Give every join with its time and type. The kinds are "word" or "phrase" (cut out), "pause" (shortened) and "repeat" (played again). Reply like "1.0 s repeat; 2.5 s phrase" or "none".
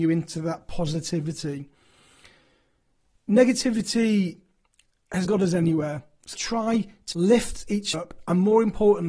5.2 s word; 6.3 s word; 7.1 s word; 7.9 s word